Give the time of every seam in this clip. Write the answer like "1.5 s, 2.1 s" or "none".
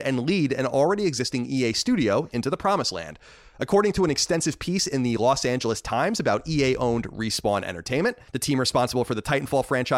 8.3 s